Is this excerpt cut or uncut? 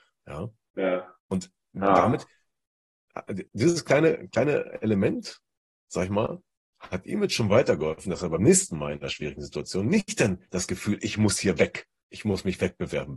cut